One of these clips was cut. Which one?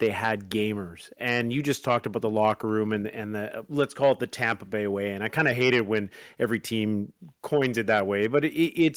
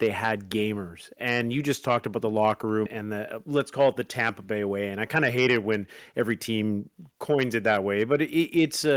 second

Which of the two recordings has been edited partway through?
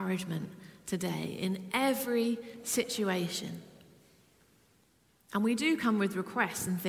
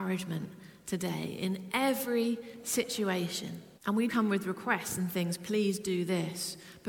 second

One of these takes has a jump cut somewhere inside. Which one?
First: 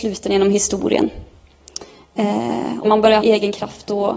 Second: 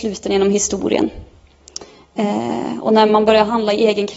first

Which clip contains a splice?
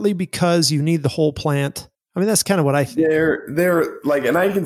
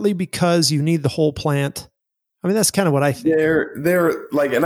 first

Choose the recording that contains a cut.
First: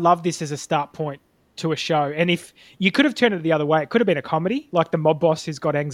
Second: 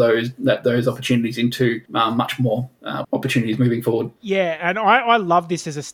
second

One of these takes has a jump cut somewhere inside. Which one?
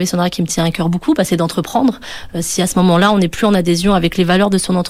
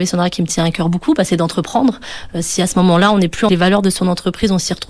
second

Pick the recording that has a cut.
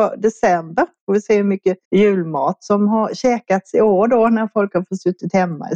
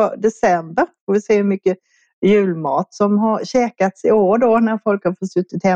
first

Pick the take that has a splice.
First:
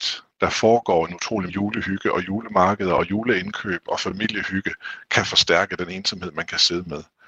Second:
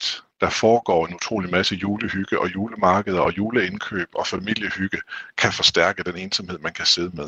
first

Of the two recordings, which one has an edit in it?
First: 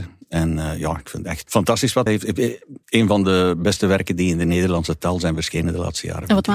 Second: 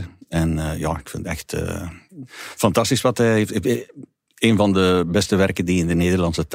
first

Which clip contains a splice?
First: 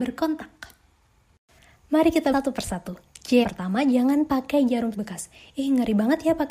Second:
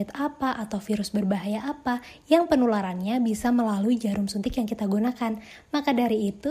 first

